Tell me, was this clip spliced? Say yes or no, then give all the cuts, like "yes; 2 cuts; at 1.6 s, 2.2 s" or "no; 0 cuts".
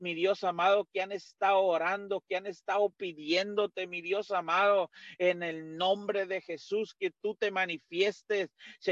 no; 0 cuts